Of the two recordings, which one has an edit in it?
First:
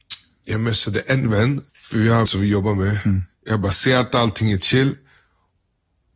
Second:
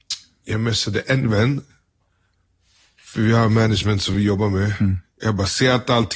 first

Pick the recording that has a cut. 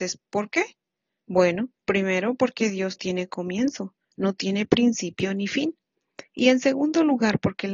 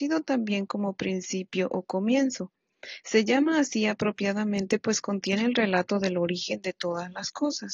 first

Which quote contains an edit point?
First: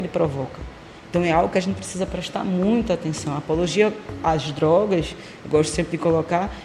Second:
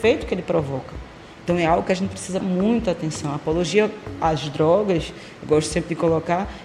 second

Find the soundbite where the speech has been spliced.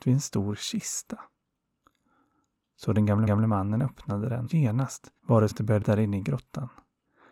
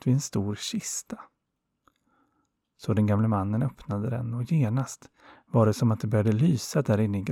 first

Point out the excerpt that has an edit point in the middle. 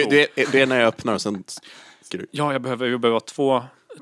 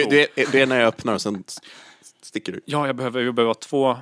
first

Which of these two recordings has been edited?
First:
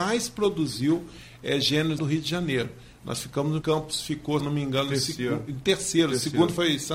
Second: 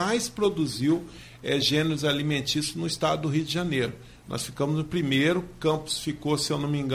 first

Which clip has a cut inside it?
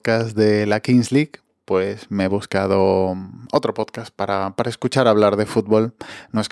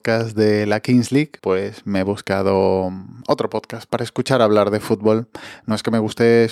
second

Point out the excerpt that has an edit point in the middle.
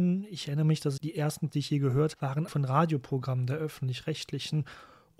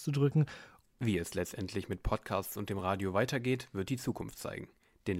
first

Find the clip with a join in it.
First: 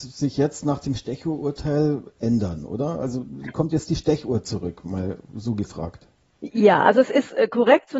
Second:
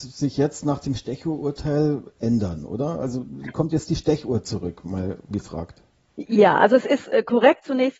second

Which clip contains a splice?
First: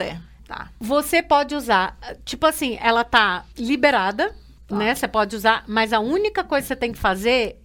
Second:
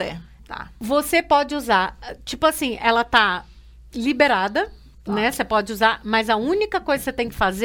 first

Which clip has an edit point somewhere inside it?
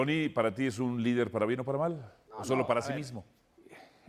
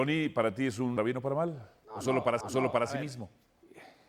second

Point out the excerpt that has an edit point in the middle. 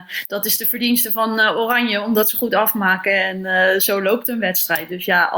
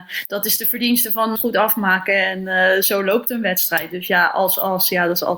second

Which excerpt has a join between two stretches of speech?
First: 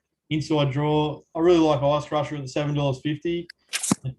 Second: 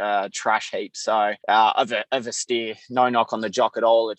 second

